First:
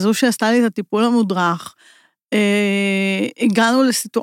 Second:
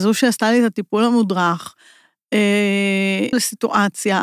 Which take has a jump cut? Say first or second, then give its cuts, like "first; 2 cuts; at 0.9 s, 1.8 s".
second; 1 cut; at 3.3 s